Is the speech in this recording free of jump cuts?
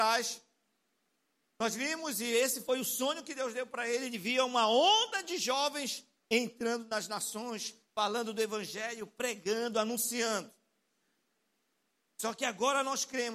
yes; 0 cuts

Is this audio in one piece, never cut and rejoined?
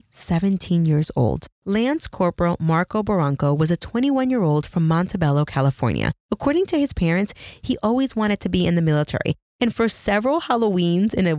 no; 2 cuts; at 1.5 s, 6.2 s

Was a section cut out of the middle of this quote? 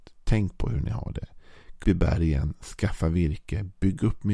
yes; 1 cut; at 1.8 s

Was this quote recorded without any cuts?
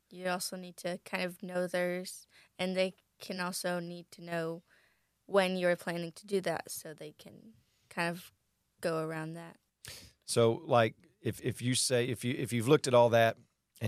yes; 0 cuts

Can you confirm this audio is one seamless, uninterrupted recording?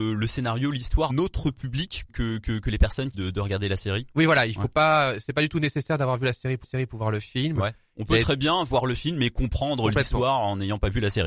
no; 4 cuts; at 1.1 s, 2.1 s, 3.1 s, 6.6 s

